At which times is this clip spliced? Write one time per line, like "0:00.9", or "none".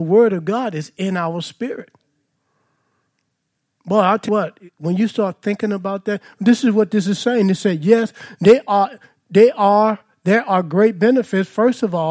0:04.3